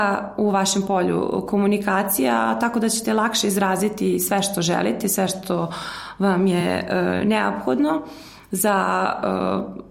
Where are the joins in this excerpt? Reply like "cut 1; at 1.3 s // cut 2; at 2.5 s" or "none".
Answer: none